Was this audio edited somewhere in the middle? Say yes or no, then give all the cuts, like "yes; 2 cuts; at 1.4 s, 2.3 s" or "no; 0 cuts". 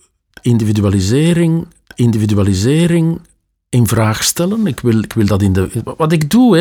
yes; 1 cut; at 1.9 s